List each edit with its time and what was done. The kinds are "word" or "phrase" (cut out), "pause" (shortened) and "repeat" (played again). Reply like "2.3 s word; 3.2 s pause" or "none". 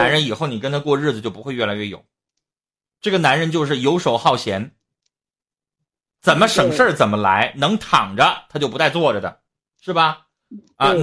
none